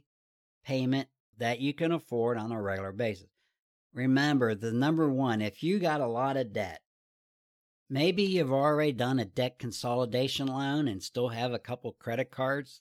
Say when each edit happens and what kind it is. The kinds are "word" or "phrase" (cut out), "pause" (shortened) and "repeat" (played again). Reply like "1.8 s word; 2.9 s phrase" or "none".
none